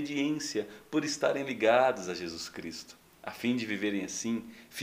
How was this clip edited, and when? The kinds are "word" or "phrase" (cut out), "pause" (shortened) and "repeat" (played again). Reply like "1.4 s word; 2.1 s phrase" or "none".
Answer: none